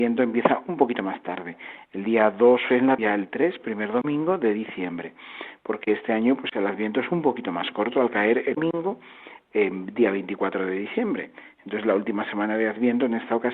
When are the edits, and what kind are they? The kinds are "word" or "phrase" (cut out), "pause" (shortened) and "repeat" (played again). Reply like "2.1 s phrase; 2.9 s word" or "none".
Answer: 3.0 s phrase; 8.5 s word